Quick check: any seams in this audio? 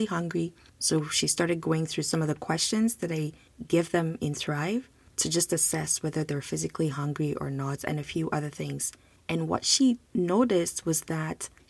no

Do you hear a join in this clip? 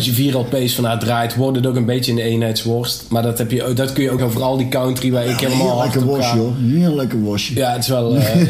yes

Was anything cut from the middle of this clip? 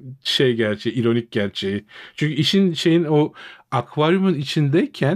no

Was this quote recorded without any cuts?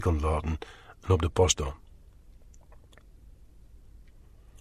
yes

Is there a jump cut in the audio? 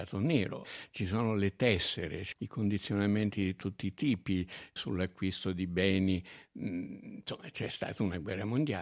yes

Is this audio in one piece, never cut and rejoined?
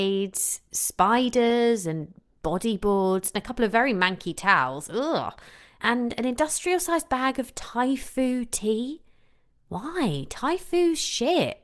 yes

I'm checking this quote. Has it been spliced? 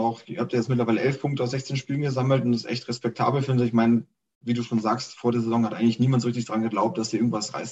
no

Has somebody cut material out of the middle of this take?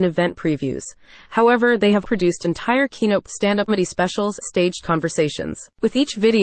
yes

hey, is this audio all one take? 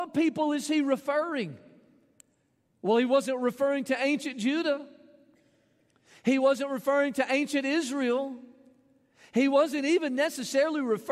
yes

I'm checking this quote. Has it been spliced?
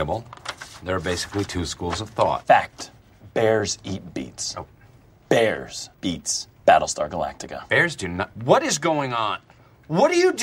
yes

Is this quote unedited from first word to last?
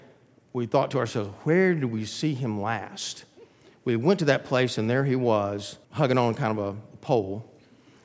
no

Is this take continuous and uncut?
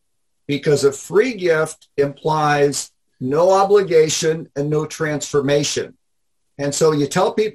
yes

